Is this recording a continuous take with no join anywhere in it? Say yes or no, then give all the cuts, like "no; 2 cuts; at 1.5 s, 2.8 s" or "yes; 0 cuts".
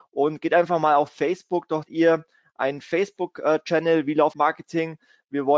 no; 2 cuts; at 1.9 s, 4.3 s